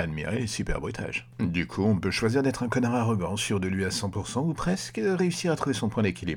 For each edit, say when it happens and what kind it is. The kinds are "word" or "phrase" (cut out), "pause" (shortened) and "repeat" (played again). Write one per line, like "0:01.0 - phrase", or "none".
none